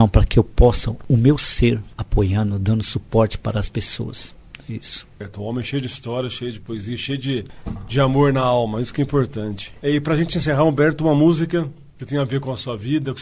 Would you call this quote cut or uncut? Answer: uncut